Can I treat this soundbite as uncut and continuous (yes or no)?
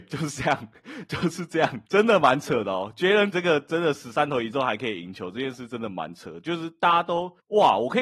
no